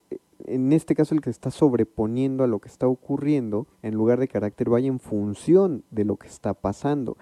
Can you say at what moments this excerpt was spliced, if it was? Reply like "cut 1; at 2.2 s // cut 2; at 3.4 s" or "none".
cut 1; at 1.2 s // cut 2; at 3.7 s // cut 3; at 4.3 s